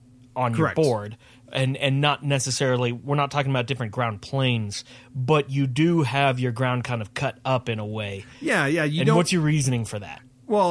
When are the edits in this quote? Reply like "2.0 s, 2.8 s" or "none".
none